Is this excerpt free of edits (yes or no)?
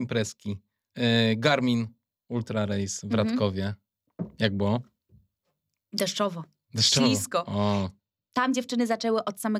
yes